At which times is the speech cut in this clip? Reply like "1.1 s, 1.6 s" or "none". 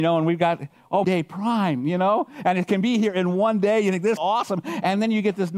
1.0 s, 4.2 s